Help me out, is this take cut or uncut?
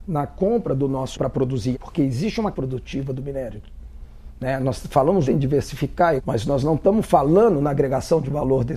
cut